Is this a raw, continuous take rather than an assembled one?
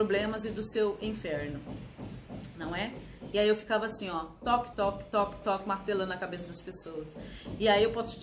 no; 2 cuts; at 4.7 s, 5.4 s

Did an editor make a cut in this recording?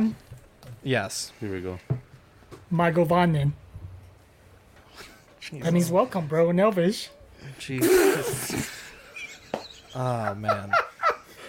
no; 0 cuts

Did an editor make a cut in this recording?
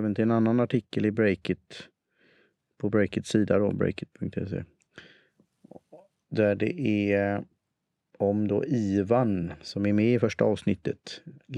no; 0 cuts

